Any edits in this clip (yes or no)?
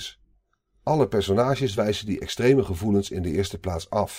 no